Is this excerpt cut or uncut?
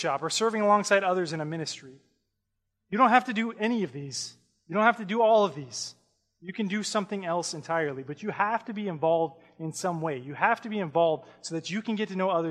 uncut